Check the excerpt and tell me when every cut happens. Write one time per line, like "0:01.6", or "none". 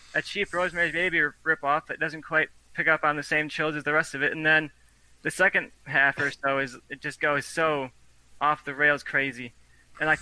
none